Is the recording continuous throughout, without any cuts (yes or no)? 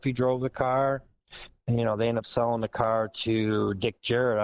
yes